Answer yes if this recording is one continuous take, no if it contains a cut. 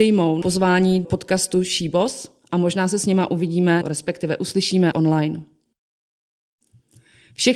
no